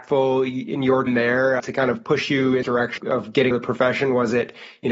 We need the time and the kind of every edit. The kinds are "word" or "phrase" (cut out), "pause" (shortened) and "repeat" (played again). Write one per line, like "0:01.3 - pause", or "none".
0:01.1 - word
0:01.6 - word
0:02.6 - word
0:03.0 - word
0:03.5 - word